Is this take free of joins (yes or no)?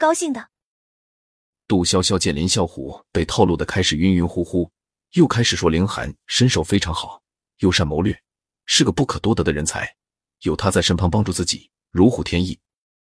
yes